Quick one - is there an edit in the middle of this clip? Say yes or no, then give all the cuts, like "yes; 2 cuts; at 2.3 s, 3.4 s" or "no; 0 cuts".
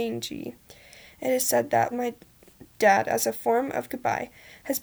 yes; 1 cut; at 1.9 s